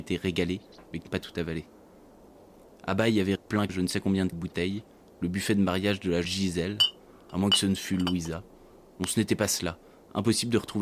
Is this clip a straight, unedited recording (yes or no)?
no